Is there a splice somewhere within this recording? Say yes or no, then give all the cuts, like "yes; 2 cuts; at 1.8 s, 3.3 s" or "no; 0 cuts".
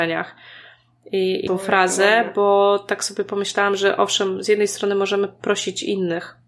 yes; 1 cut; at 1.5 s